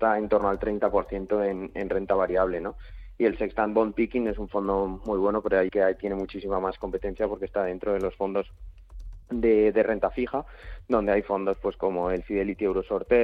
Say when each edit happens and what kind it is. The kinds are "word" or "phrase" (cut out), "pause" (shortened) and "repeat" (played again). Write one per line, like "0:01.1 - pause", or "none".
0:05.7 - phrase
0:09.2 - pause